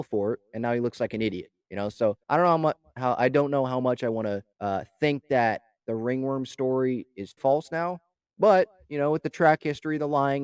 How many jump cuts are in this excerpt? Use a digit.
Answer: 4